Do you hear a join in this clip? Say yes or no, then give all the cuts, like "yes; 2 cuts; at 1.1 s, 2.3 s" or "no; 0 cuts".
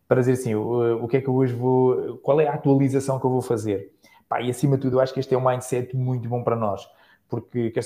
no; 0 cuts